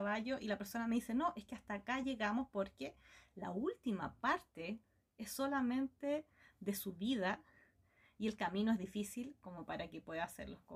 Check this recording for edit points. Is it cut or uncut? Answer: uncut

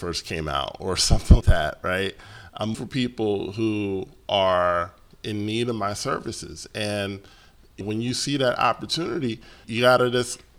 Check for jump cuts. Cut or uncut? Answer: cut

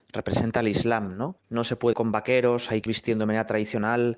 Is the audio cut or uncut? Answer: cut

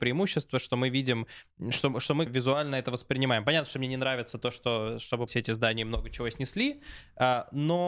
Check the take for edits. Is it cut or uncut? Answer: cut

